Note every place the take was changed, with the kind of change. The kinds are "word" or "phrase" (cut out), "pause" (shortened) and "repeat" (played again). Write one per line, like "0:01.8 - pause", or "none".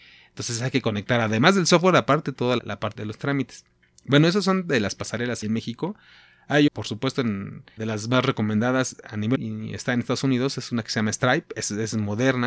0:02.6 - word
0:03.0 - word
0:05.4 - word
0:06.7 - word
0:07.8 - word
0:09.4 - word